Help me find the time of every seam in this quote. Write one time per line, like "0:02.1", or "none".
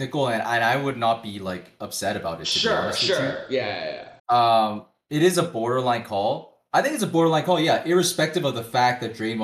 0:04.2